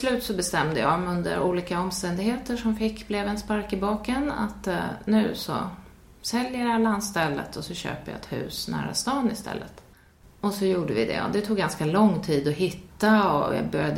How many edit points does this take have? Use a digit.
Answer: 0